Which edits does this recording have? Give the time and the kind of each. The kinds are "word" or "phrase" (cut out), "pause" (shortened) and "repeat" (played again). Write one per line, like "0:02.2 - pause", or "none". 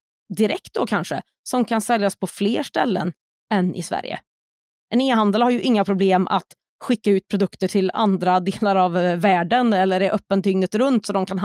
none